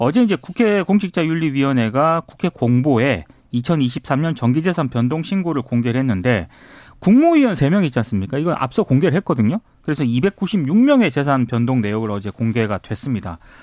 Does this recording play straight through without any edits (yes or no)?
yes